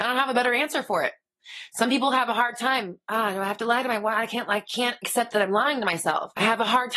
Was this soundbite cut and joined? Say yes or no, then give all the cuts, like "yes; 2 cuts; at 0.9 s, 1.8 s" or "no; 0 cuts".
no; 0 cuts